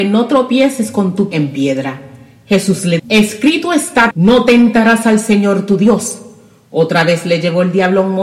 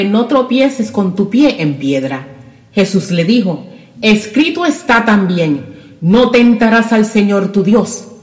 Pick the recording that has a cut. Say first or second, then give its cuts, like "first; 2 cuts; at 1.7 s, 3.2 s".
first; 3 cuts; at 1.3 s, 3.0 s, 4.1 s